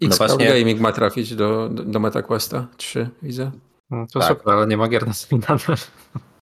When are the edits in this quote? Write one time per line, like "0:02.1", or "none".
none